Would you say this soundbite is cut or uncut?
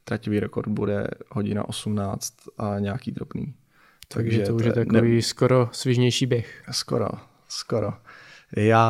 uncut